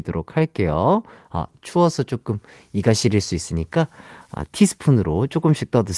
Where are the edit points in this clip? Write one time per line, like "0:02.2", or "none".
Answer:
none